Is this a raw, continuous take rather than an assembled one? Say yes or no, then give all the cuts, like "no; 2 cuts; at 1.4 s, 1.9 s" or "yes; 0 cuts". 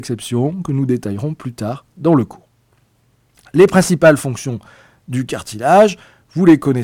yes; 0 cuts